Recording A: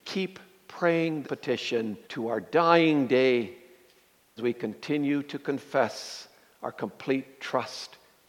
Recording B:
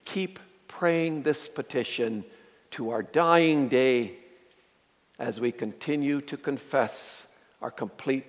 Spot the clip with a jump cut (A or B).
A